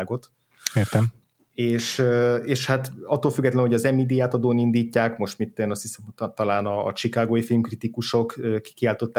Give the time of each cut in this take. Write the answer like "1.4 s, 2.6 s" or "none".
none